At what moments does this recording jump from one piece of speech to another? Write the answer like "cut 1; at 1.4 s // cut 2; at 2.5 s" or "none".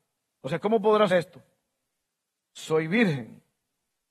cut 1; at 1.1 s